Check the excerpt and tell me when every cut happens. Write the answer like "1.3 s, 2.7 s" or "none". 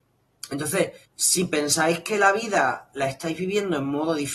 1.0 s